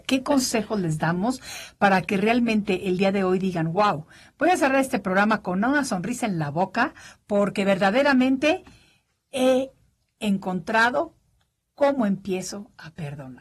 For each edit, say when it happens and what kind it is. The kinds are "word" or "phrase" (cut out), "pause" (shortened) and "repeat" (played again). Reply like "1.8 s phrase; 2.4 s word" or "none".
none